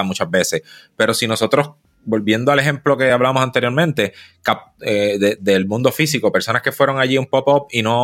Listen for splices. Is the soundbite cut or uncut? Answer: uncut